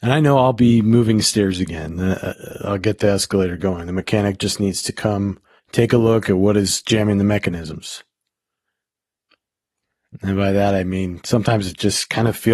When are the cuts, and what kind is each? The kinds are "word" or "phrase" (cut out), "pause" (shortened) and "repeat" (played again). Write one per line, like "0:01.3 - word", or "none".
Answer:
0:05.6 - pause